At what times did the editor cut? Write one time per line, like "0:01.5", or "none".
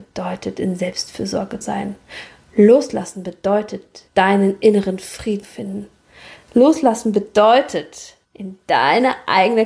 0:01.6
0:04.1
0:05.4
0:08.2